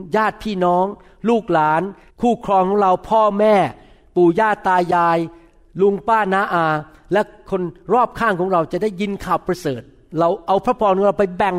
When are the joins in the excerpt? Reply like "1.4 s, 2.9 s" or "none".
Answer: 2.1 s